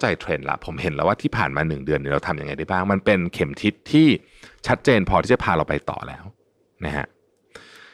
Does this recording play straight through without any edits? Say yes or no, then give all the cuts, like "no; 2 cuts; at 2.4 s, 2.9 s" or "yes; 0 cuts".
yes; 0 cuts